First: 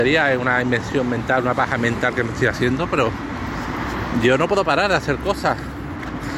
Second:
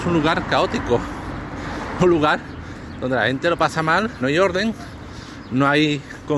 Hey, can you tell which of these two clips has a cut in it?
second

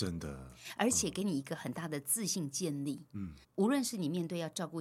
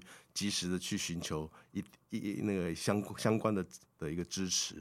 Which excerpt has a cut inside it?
first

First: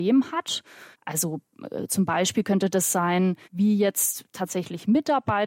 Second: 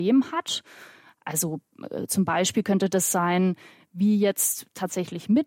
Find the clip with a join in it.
first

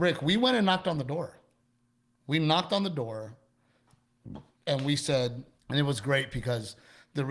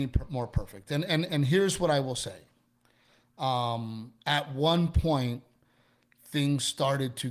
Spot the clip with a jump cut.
first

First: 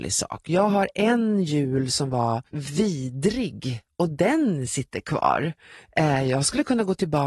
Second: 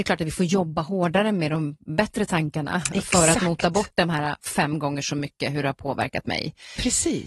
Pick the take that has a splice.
first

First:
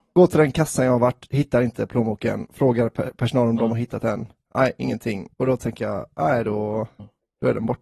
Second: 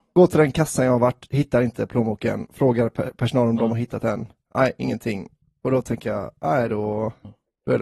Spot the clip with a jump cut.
first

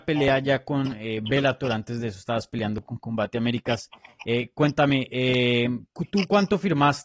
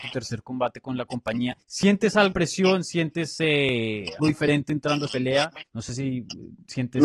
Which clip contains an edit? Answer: second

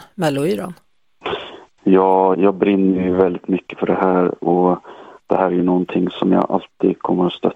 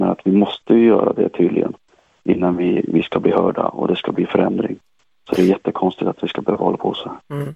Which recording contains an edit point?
first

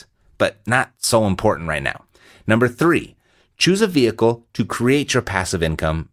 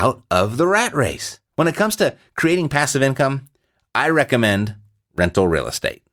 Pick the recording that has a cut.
second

